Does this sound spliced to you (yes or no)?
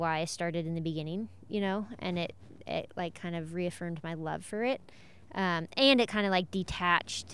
no